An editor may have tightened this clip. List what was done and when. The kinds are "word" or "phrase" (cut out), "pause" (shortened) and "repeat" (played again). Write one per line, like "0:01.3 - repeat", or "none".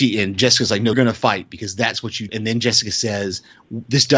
0:00.9 - word
0:02.3 - word